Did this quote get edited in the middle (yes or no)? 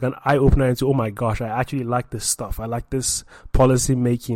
no